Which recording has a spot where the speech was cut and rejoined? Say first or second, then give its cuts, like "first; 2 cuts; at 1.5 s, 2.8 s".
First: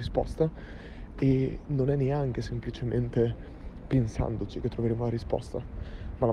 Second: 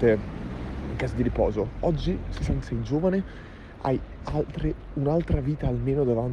second; 1 cut; at 2.6 s